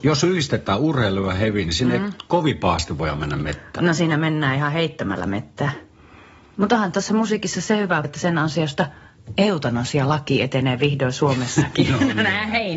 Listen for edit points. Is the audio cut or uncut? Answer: cut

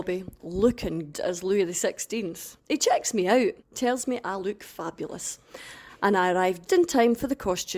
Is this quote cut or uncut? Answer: cut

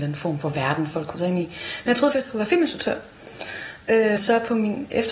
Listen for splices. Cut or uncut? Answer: cut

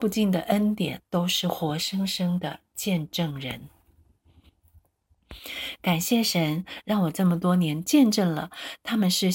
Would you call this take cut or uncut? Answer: cut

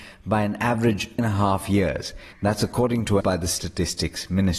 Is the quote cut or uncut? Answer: cut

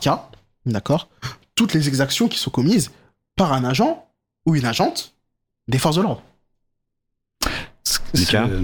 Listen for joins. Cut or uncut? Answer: uncut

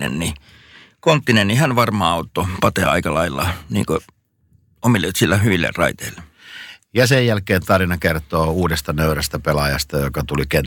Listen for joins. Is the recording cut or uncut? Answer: uncut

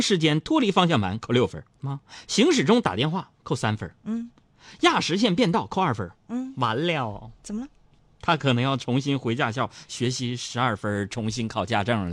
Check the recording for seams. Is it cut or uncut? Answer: cut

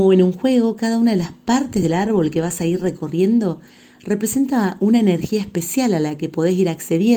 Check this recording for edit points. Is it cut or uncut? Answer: uncut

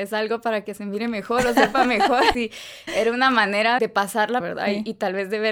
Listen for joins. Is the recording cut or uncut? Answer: cut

